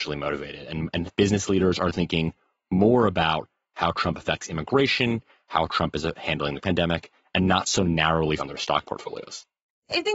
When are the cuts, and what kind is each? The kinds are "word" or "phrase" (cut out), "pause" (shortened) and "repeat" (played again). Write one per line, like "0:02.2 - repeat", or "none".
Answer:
0:06.6 - word
0:08.4 - word